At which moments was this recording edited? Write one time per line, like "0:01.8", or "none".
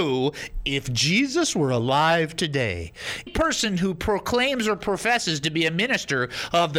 0:03.3